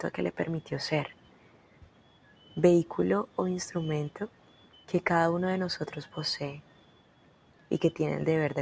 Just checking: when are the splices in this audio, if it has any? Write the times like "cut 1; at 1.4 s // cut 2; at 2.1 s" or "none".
cut 1; at 4.7 s